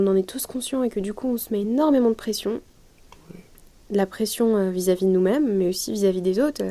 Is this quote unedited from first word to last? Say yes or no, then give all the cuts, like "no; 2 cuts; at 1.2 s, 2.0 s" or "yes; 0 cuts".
yes; 0 cuts